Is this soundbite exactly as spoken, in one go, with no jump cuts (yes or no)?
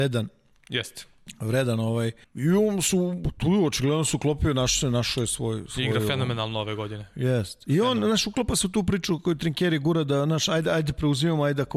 no